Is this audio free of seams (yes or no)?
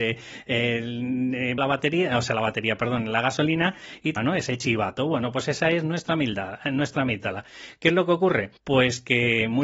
no